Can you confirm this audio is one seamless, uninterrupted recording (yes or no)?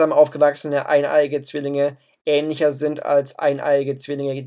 yes